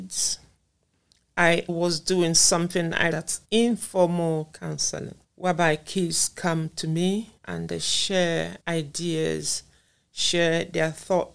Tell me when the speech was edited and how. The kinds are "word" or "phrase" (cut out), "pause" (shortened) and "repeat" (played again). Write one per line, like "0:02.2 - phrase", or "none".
0:01.7 - word
0:03.1 - word
0:03.4 - pause
0:05.2 - pause
0:07.4 - pause
0:08.6 - pause